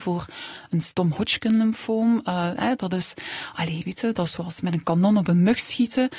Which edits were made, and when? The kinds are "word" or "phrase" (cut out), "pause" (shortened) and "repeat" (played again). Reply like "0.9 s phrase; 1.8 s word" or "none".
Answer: none